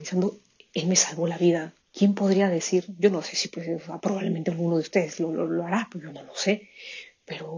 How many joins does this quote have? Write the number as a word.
one